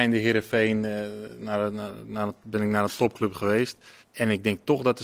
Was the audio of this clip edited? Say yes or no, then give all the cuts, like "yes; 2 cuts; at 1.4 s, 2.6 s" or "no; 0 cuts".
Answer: yes; 1 cut; at 4.0 s